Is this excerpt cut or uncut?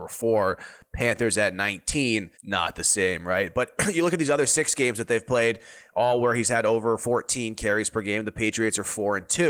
cut